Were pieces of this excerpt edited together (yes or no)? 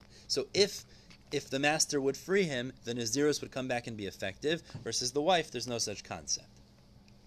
no